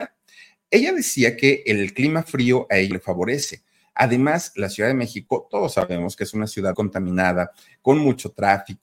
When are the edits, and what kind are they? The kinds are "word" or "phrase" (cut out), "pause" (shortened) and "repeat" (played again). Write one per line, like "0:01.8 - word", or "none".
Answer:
0:02.9 - word
0:06.7 - word